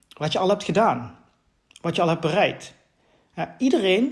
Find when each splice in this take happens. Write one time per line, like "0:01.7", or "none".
none